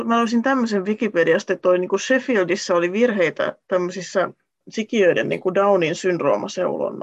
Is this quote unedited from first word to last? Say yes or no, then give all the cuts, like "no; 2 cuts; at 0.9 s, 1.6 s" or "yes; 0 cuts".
yes; 0 cuts